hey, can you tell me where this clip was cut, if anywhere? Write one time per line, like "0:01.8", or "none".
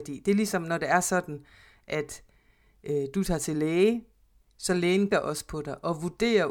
0:05.1